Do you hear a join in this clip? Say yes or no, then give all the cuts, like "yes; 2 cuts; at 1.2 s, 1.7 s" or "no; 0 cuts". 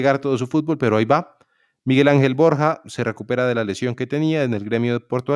no; 0 cuts